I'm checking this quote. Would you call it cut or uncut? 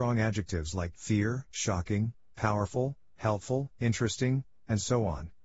cut